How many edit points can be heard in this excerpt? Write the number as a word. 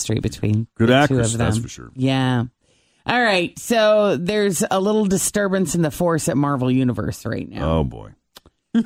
zero